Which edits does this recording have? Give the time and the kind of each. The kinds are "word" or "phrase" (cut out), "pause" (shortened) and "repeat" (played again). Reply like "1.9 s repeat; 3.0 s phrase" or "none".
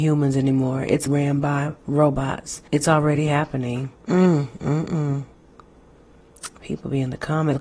1.1 s phrase; 2.7 s pause; 3.9 s pause